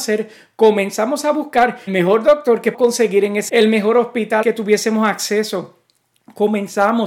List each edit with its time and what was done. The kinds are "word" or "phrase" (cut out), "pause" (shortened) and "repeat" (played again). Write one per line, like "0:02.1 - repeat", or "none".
0:01.9 - word
0:02.7 - word
0:03.5 - word
0:04.4 - word